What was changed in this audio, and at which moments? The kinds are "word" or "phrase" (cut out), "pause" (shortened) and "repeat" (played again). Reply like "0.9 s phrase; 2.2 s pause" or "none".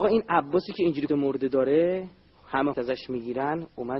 1.1 s word; 2.7 s word

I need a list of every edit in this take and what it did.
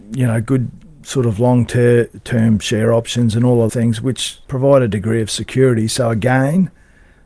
3.7 s word; 4.4 s word

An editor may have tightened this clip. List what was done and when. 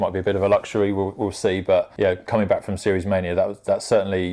none

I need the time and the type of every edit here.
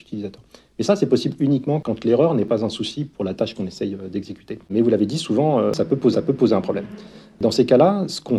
4.6 s pause; 6.1 s repeat

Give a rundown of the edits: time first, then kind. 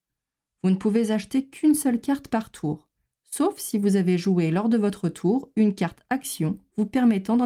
none

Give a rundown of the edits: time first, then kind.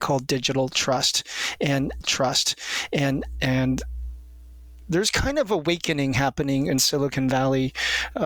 2.0 s repeat

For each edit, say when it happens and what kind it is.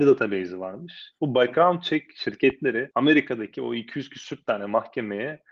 1.2 s pause

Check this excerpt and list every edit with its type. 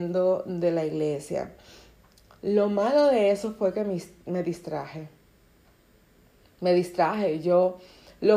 none

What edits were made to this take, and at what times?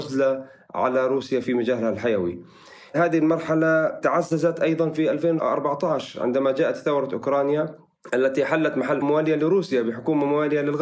9.0 s word

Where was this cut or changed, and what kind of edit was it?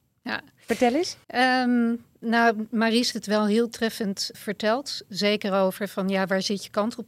1.2 s pause; 3.1 s word; 4.3 s word

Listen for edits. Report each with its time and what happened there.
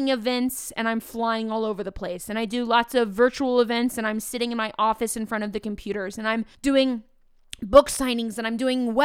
6.5 s pause

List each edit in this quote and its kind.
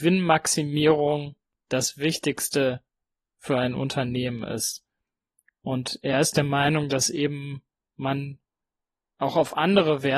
none

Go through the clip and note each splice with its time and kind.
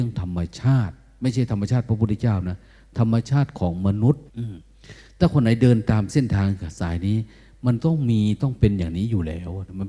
4.3 s pause

